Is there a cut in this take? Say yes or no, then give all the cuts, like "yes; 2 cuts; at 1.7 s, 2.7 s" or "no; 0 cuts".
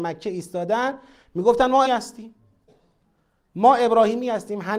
yes; 1 cut; at 1.9 s